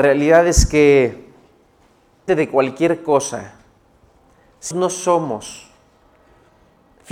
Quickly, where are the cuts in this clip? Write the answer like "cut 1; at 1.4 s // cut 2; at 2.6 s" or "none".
cut 1; at 2.3 s // cut 2; at 4.7 s